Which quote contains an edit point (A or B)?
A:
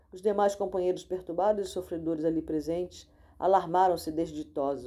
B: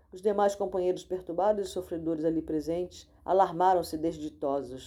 B